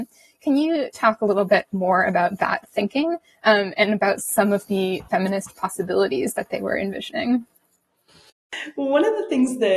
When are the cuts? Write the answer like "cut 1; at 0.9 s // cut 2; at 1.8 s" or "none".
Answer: none